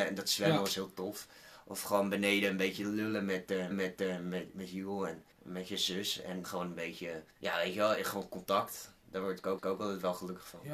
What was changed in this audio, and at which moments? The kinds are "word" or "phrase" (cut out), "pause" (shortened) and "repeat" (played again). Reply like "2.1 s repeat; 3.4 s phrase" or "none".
3.7 s repeat; 5.3 s pause; 6.4 s word; 7.3 s pause; 9.6 s repeat